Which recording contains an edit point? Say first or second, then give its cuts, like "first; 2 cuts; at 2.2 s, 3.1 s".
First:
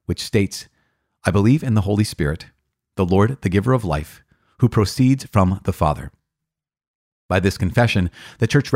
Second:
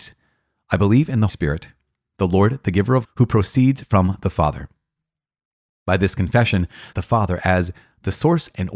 second; 3 cuts; at 1.3 s, 3.0 s, 6.9 s